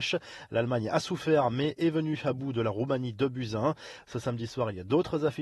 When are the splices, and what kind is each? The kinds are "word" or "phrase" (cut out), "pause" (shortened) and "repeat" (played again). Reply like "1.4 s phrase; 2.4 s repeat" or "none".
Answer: none